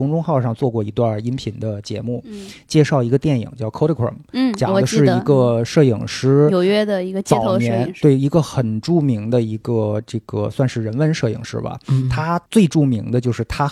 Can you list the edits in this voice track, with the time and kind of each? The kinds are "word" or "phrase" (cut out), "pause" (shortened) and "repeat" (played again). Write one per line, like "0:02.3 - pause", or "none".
0:12.5 - pause